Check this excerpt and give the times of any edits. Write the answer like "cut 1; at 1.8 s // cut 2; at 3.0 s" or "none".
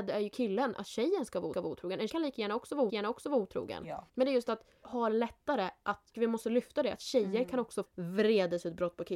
cut 1; at 1.5 s // cut 2; at 2.1 s // cut 3; at 2.9 s // cut 4; at 4.1 s // cut 5; at 4.8 s // cut 6; at 6.1 s // cut 7; at 7.9 s